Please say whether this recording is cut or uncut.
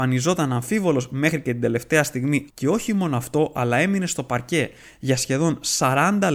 cut